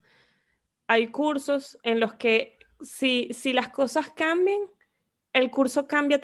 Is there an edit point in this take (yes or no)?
no